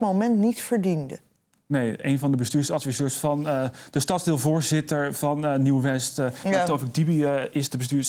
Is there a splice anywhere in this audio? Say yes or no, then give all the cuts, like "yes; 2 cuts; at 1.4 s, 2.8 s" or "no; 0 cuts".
no; 0 cuts